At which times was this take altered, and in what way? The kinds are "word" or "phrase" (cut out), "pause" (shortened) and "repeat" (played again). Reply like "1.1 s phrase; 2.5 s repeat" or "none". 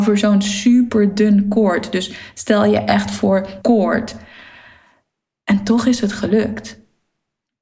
3.6 s word